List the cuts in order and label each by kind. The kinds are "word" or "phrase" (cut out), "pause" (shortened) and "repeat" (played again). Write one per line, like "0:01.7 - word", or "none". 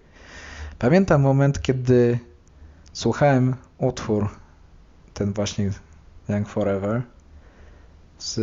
none